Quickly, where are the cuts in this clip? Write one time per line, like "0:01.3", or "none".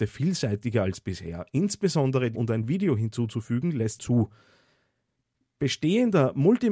0:02.3
0:04.0